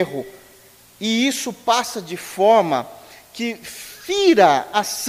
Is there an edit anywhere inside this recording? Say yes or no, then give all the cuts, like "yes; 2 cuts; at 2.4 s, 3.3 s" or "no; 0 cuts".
no; 0 cuts